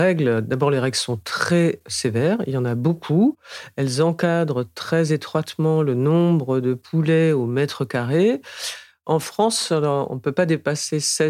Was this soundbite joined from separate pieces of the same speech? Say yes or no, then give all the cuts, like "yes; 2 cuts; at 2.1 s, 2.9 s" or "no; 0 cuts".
no; 0 cuts